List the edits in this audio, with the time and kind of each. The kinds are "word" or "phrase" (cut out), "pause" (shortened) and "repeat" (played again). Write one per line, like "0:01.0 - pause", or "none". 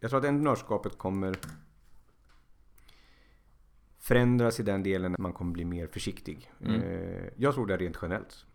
0:01.0 - word
0:05.2 - word